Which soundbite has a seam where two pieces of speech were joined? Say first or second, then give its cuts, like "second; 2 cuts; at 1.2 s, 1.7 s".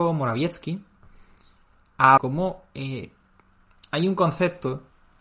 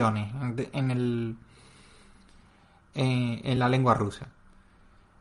first; 1 cut; at 2.2 s